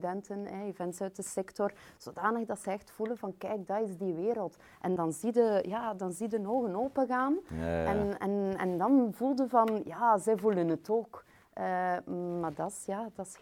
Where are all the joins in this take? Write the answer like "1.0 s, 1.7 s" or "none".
5.0 s